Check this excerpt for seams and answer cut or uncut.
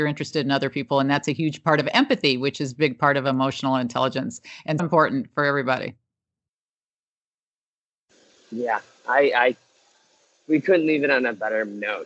cut